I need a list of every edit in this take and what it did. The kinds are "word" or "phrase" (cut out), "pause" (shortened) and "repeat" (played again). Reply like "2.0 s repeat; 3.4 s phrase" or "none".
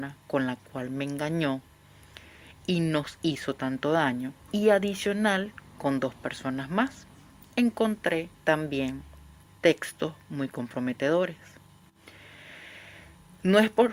4.4 s pause; 8.3 s pause